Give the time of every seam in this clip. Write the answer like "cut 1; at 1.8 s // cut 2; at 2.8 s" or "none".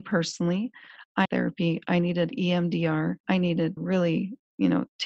cut 1; at 1.2 s // cut 2; at 3.2 s // cut 3; at 3.8 s